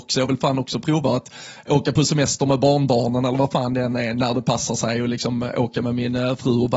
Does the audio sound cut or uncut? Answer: uncut